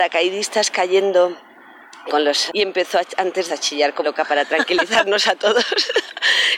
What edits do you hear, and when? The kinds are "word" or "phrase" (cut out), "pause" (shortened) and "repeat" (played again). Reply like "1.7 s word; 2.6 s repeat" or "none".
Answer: 2.1 s word; 2.5 s phrase; 3.5 s phrase; 4.0 s word